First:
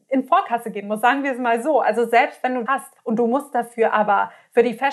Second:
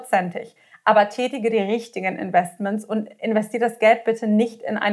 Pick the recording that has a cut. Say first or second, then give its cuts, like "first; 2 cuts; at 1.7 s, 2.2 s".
first; 2 cuts; at 2.7 s, 3.0 s